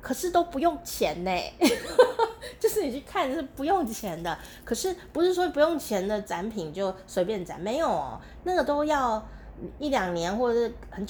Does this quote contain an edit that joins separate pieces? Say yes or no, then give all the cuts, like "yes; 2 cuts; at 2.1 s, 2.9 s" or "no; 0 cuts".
no; 0 cuts